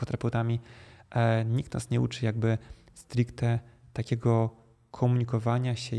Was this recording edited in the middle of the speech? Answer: no; 0 cuts

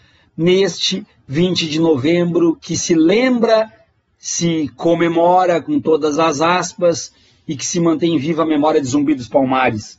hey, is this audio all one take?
yes; 0 cuts

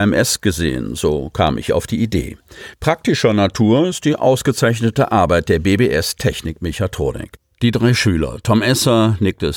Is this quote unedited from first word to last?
yes; 0 cuts

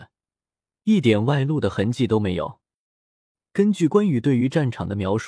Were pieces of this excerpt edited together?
no; 0 cuts

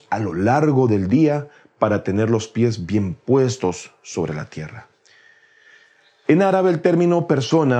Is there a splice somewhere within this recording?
no; 0 cuts

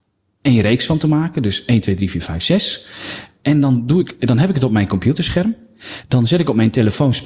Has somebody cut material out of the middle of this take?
no; 0 cuts

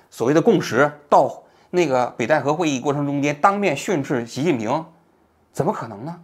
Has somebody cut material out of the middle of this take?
no; 0 cuts

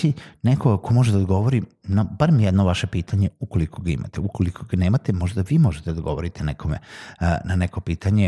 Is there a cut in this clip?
no; 0 cuts

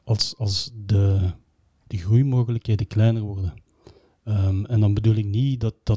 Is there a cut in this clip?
no; 0 cuts

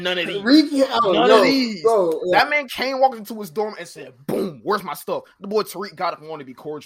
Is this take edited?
no; 0 cuts

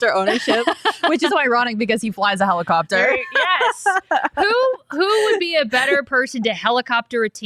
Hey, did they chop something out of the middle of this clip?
yes; 1 cut; at 1.3 s

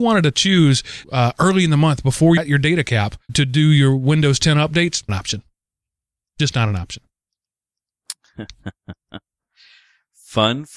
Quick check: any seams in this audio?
yes; 4 cuts; at 1.0 s, 2.4 s, 3.3 s, 5.1 s

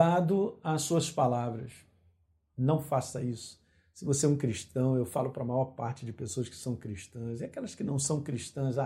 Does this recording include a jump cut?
no; 0 cuts

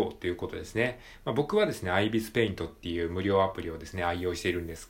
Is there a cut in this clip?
no; 0 cuts

